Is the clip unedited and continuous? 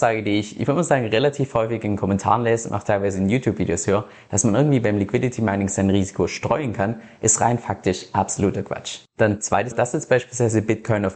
no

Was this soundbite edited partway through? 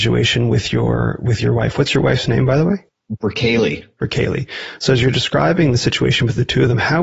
no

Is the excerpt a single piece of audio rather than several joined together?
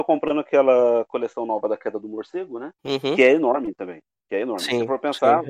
no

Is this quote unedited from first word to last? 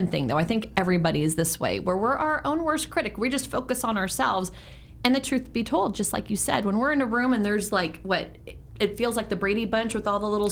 yes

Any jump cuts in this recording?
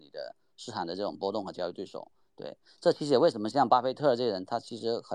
no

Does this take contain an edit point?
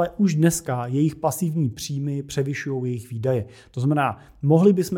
no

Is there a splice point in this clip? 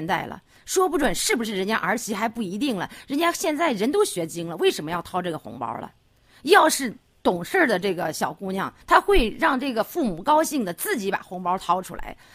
yes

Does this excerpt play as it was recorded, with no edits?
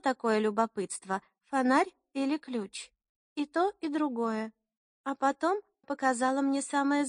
no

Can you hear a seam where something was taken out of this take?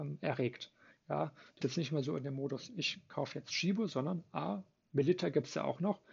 yes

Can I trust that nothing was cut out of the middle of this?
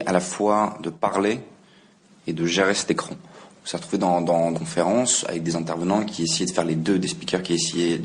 no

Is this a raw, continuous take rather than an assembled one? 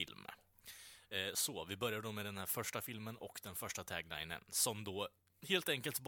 yes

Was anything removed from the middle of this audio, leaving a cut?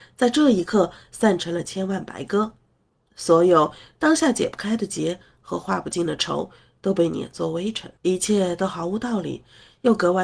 yes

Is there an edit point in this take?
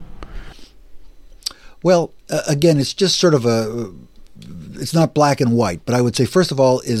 yes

